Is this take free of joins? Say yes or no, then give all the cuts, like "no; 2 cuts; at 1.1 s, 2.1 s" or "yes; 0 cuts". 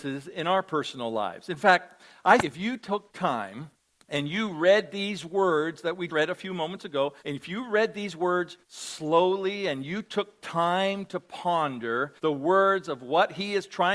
no; 6 cuts; at 2.4 s, 3.9 s, 6.1 s, 7.2 s, 8.6 s, 12.2 s